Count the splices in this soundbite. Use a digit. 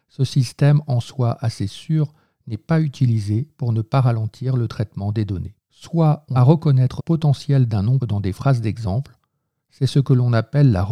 4